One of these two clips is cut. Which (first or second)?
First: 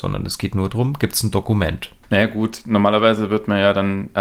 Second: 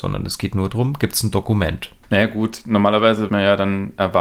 second